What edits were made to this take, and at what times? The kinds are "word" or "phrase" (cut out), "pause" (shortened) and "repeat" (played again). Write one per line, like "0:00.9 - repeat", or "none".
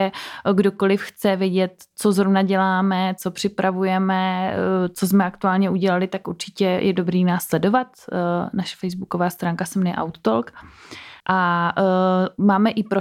0:11.2 - pause